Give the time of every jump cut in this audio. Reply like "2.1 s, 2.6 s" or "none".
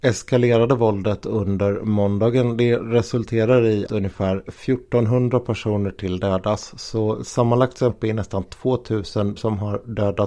3.9 s, 7.9 s, 9.4 s